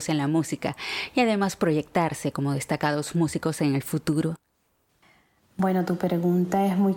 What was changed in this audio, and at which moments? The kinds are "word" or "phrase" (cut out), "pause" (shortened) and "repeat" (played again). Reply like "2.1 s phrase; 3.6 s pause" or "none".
none